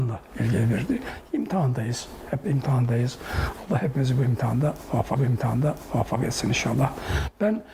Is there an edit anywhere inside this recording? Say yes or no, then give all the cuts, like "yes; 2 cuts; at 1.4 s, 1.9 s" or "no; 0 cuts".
yes; 2 cuts; at 2.4 s, 5.2 s